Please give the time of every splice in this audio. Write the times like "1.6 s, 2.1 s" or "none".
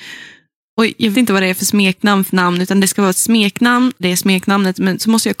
1.1 s, 2.3 s, 4.0 s